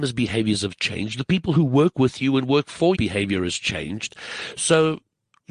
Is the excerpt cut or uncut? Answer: cut